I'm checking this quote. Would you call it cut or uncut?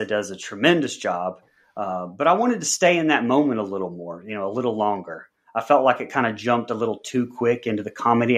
uncut